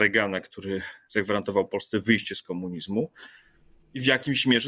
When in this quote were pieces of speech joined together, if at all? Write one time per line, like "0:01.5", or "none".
none